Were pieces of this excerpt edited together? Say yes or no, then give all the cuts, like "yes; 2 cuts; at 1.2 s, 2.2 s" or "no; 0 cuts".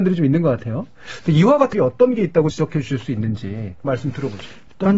yes; 3 cuts; at 1.7 s, 2.5 s, 3.8 s